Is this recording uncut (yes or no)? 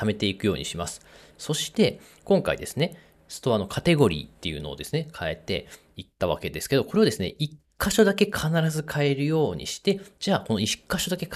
yes